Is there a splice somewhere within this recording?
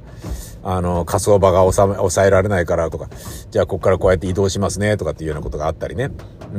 yes; 1 cut; at 2.9 s

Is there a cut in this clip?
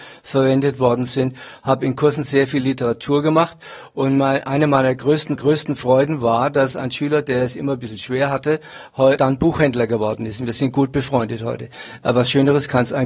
yes; 2 cuts; at 5.4 s, 9.2 s

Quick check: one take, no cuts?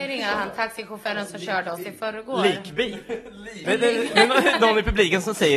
yes; 0 cuts

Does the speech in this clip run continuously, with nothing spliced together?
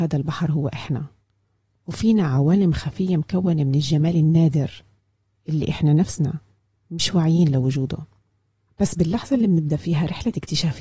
yes; 0 cuts

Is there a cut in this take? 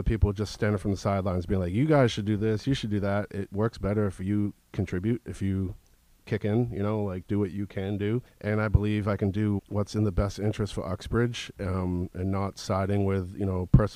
yes; 2 cuts; at 8.3 s, 9.6 s

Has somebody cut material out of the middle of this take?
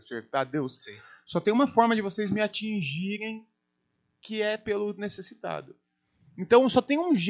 no; 0 cuts

